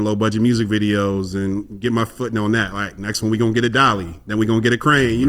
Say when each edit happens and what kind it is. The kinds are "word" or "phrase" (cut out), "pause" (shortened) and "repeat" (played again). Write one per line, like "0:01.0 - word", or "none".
none